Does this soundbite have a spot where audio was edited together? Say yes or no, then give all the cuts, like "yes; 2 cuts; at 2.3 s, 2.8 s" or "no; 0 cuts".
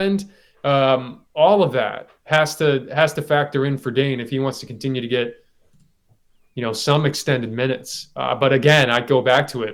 no; 0 cuts